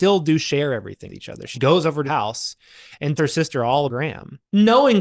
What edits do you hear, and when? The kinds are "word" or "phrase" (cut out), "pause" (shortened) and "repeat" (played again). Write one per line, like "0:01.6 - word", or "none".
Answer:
0:01.1 - word
0:01.5 - word
0:02.0 - word
0:03.2 - word
0:03.9 - word